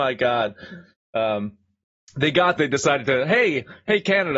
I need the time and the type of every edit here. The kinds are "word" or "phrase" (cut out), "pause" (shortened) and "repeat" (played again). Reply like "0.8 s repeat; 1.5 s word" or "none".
2.6 s phrase